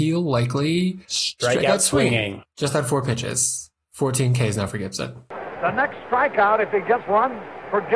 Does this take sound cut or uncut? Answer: cut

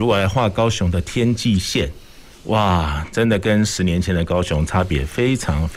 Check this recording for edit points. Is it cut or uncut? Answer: uncut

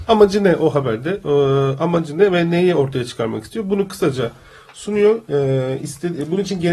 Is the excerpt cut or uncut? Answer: uncut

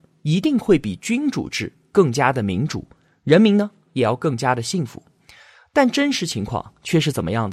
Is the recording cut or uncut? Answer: uncut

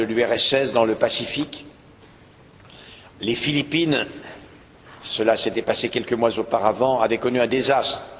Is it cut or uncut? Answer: uncut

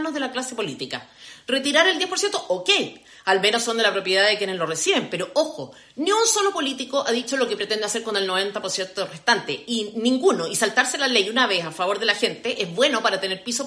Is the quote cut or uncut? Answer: uncut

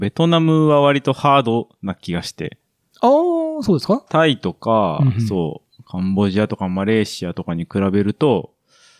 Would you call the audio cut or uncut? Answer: uncut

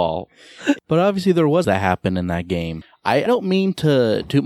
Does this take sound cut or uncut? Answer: cut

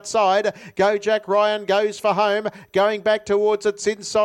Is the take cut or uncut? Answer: uncut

